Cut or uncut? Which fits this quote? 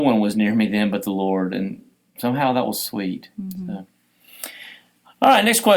uncut